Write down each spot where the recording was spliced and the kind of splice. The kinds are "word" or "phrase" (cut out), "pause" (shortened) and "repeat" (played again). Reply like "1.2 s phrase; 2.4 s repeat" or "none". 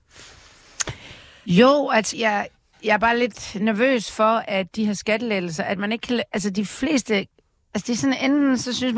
2.1 s word

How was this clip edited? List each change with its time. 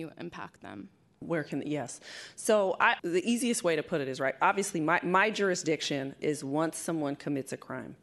3.0 s phrase

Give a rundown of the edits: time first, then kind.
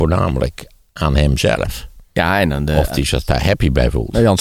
none

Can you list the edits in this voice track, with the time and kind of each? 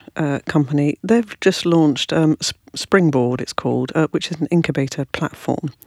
none

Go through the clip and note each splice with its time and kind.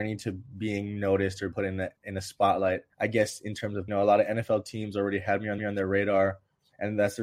1.5 s word; 2.9 s pause; 3.9 s phrase; 5.6 s repeat

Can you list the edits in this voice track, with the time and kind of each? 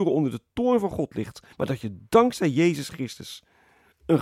1.5 s pause

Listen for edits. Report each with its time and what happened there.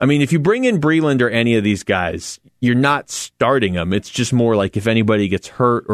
none

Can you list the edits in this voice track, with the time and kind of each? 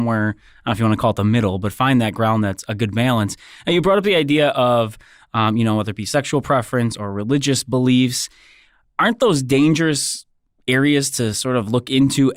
none

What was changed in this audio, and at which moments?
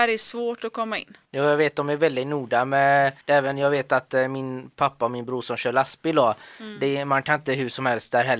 1.2 s pause; 3.2 s pause

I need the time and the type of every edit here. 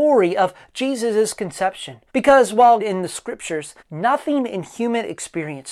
2.1 s pause; 2.8 s phrase; 3.8 s pause

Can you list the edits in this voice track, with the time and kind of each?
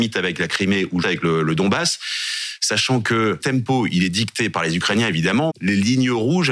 1.0 s word; 3.4 s word; 5.5 s word

